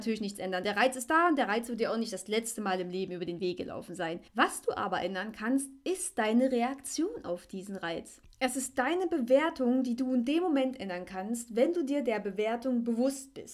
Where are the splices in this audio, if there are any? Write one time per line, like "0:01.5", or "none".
0:04.3